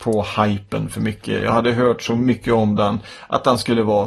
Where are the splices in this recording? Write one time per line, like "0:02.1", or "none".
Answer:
none